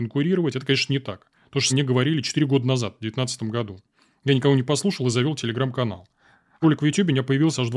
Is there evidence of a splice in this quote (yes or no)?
yes